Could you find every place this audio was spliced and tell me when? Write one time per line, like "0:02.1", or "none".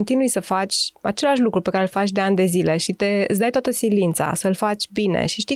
none